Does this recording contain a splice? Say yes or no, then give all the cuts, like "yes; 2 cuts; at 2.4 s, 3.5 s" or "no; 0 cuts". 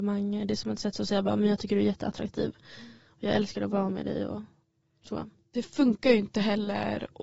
no; 0 cuts